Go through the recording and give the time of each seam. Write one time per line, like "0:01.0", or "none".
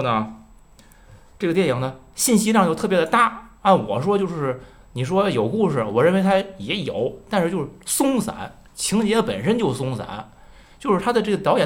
0:03.6
0:08.7